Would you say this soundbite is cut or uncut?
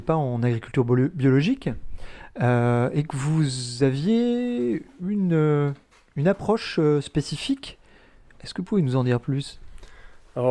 uncut